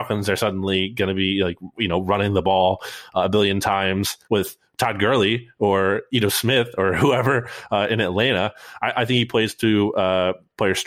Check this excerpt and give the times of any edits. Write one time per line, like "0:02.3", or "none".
0:04.2